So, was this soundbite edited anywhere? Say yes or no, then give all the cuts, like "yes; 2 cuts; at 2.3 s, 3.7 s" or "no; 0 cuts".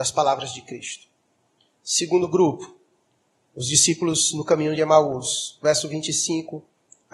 no; 0 cuts